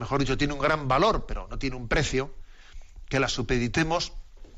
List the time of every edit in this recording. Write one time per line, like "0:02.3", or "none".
none